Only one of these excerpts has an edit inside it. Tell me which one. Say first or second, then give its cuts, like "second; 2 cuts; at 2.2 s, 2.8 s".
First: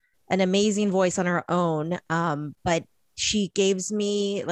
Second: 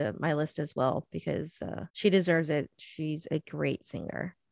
second; 1 cut; at 1.9 s